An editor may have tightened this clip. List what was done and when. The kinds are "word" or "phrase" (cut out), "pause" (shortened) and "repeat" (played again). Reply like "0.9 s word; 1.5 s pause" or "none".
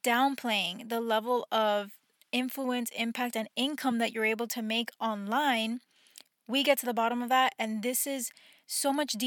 none